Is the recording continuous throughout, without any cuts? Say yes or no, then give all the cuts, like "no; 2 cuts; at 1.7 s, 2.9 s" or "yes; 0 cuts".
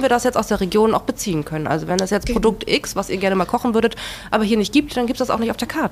yes; 0 cuts